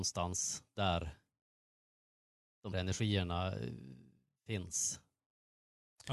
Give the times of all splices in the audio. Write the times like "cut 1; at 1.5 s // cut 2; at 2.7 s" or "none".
cut 1; at 2.7 s

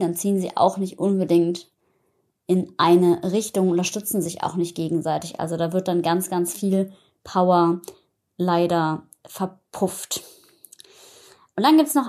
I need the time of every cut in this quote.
none

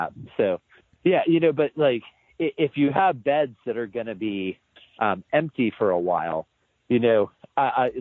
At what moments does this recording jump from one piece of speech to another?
none

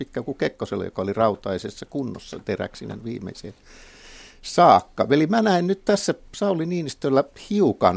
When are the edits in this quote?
none

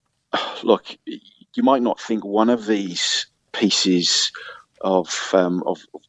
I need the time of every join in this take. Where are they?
none

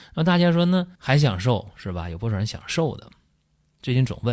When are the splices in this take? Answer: cut 1; at 0.9 s

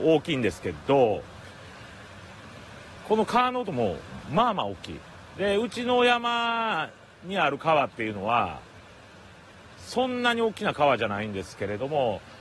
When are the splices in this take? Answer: none

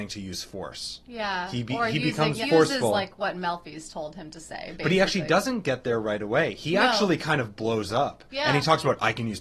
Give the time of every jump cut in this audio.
cut 1; at 2.4 s

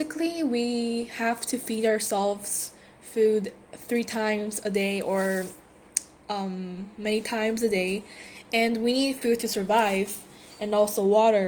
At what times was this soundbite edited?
none

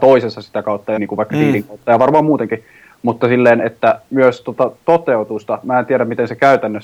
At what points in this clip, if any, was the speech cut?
cut 1; at 1.0 s

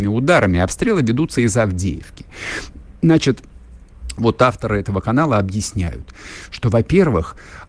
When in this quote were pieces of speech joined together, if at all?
none

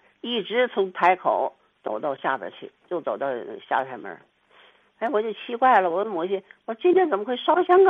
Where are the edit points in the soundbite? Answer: none

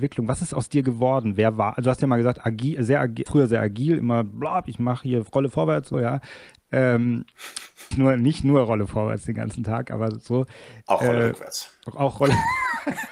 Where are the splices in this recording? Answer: cut 1; at 3.3 s // cut 2; at 5.9 s // cut 3; at 7.9 s

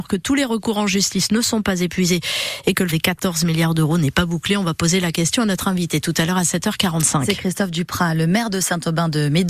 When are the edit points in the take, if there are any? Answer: cut 1; at 2.9 s

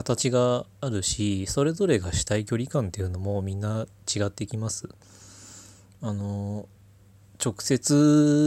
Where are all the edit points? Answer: none

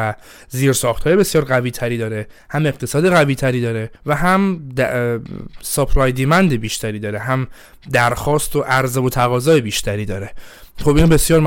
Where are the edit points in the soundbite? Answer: cut 1; at 4.0 s

